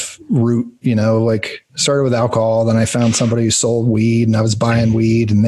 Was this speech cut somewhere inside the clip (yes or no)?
no